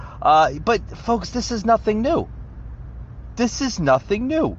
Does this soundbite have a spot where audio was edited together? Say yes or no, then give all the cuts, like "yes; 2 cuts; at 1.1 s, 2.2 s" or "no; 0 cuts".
no; 0 cuts